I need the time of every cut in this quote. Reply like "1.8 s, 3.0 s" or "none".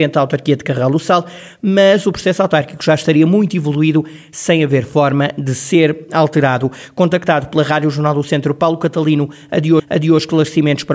9.8 s